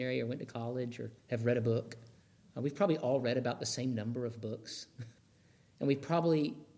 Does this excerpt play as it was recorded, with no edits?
no; 3 cuts; at 1.2 s, 2.2 s, 5.2 s

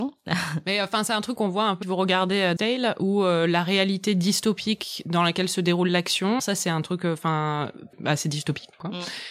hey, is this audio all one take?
no; 3 cuts; at 1.8 s, 2.6 s, 6.4 s

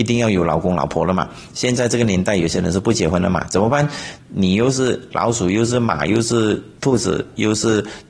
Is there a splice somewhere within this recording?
yes; 1 cut; at 6.8 s

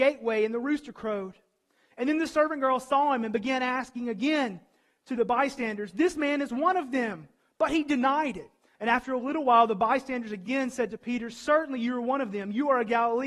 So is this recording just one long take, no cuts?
yes; 0 cuts

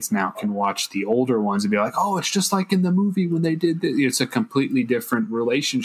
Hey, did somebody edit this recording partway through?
no; 0 cuts

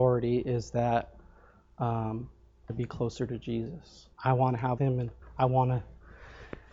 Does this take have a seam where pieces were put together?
yes; 4 cuts; at 2.7 s, 4.1 s, 4.8 s, 5.2 s

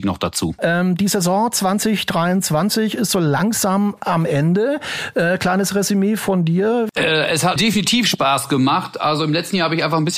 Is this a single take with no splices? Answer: no; 1 cut; at 7.6 s

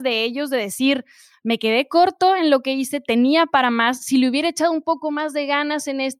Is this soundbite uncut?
yes; 0 cuts

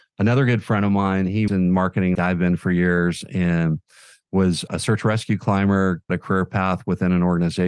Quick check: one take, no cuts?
no; 4 cuts; at 1.5 s, 2.1 s, 4.7 s, 6.1 s

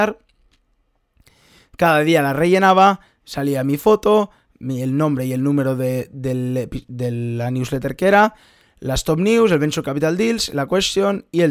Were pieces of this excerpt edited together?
no; 0 cuts

